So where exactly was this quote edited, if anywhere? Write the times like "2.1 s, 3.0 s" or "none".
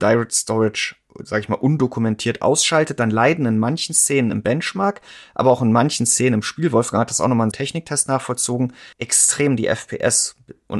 7.5 s, 8.9 s